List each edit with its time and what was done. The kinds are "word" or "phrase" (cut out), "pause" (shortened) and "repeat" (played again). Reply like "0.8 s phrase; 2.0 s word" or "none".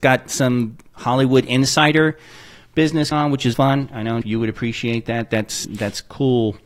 3.1 s word; 3.5 s word; 4.2 s word; 5.6 s word